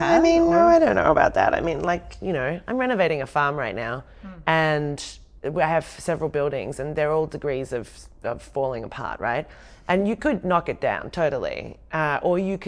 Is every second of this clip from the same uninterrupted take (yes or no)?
yes